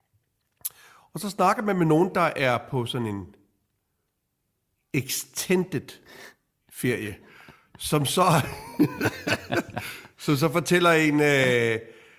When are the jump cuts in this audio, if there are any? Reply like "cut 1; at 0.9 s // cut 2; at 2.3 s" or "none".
none